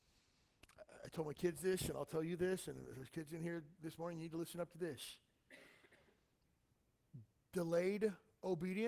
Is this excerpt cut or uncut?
uncut